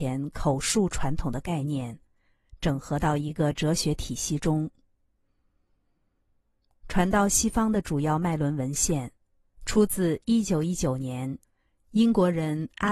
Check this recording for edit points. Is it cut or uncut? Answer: uncut